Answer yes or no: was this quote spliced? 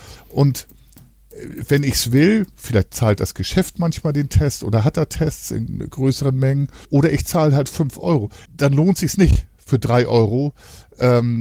yes